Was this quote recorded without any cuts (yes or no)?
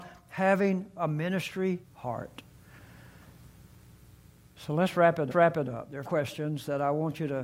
no